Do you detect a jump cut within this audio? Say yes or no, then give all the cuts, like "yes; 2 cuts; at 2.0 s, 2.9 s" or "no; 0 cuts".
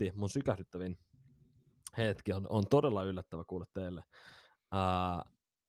no; 0 cuts